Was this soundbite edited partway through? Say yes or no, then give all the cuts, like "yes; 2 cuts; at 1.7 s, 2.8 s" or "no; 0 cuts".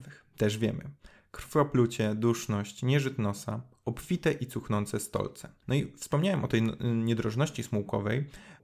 no; 0 cuts